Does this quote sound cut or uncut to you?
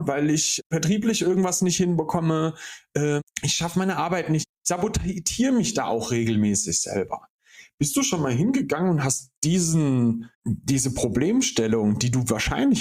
cut